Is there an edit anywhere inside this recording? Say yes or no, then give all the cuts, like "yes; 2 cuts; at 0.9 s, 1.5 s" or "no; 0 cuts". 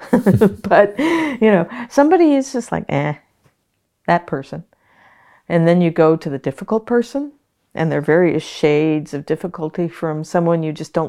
no; 0 cuts